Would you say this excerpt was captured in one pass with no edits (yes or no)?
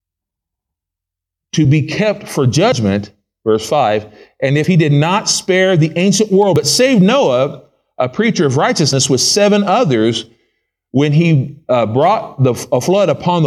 yes